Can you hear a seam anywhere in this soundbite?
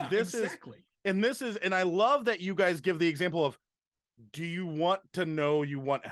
no; 0 cuts

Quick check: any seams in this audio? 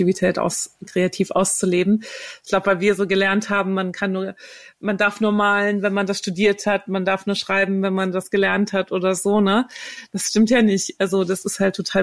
no; 0 cuts

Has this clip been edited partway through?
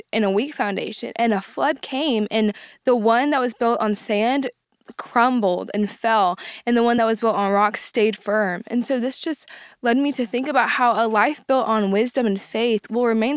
no; 0 cuts

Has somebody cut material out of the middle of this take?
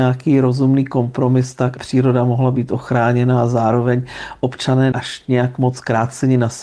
yes; 2 cuts; at 1.8 s, 4.9 s

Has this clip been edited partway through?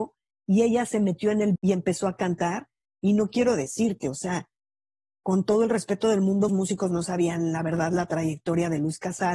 yes; 2 cuts; at 1.6 s, 6.5 s

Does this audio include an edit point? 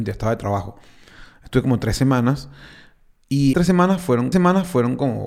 yes; 2 cuts; at 3.5 s, 4.3 s

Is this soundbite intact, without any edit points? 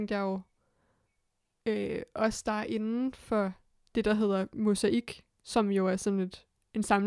yes; 0 cuts

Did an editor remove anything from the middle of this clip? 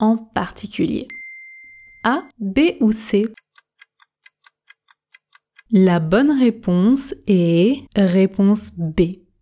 yes; 2 cuts; at 2.3 s, 7.9 s

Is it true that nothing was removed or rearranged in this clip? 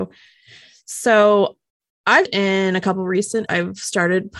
no; 2 cuts; at 2.3 s, 3.5 s

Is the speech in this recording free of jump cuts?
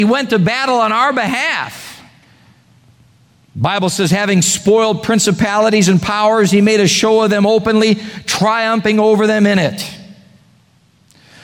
yes; 0 cuts

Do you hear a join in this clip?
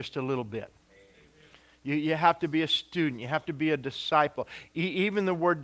no; 0 cuts

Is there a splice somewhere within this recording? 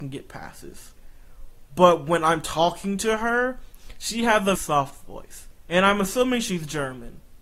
yes; 1 cut; at 4.5 s

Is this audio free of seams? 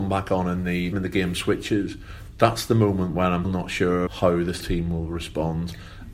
no; 5 cuts; at 0.9 s, 2.3 s, 3.4 s, 4.1 s, 4.6 s

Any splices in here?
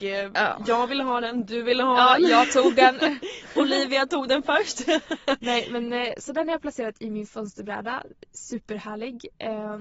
no; 0 cuts

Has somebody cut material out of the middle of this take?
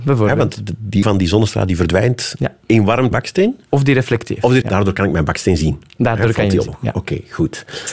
yes; 4 cuts; at 1.0 s, 3.1 s, 4.6 s, 6.7 s

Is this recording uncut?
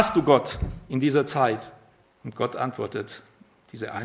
no; 1 cut; at 2.0 s

